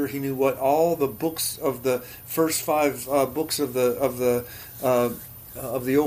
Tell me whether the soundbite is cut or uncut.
uncut